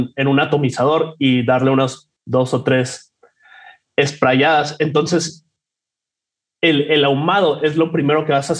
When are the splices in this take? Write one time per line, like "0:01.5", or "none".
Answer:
0:02.2